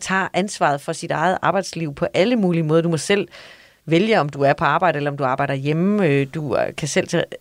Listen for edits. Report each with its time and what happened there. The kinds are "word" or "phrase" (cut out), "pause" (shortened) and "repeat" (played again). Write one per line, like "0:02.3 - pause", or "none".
none